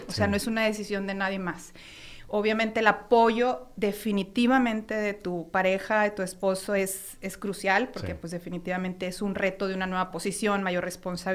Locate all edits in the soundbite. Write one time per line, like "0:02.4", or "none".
none

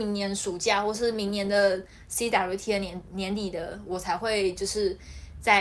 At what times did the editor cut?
none

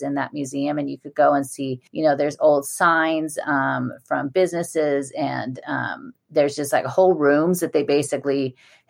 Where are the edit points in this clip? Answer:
0:01.9

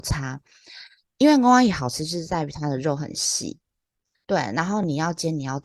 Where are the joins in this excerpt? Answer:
none

